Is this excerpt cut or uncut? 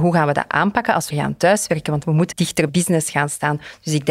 cut